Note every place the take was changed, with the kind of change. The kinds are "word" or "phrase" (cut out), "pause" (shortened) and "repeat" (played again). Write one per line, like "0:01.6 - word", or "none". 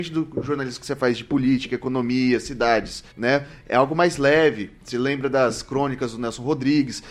0:03.1 - pause

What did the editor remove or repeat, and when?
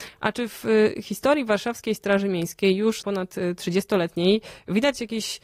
0:03.0 - phrase

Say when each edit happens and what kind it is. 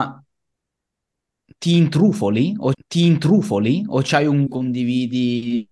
0:02.7 - repeat
0:04.5 - phrase

